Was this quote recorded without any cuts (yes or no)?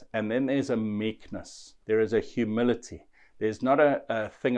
no